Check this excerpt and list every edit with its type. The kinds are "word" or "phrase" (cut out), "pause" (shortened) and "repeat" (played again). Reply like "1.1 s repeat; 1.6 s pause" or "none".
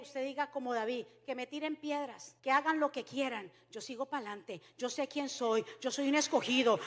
2.4 s pause

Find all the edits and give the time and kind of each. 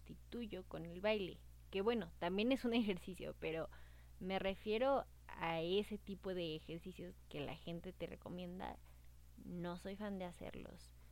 none

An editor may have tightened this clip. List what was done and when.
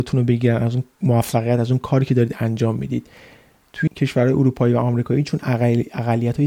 0.9 s pause; 3.9 s word

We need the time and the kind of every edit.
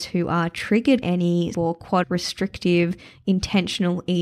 1.0 s word; 1.5 s word; 2.0 s word

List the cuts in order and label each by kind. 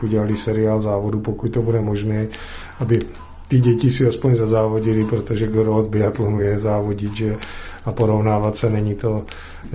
none

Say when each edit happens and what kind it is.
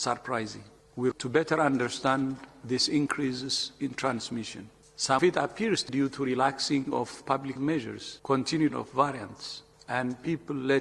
1.1 s word; 5.2 s word; 5.9 s word; 7.6 s word; 8.7 s word

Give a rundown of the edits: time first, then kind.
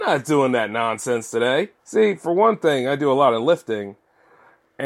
1.8 s pause

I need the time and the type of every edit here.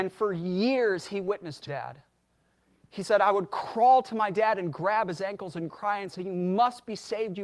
1.7 s word

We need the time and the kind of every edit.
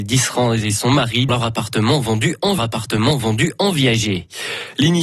1.3 s word; 2.6 s repeat

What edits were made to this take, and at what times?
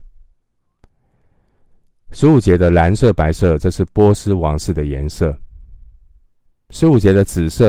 6.5 s pause

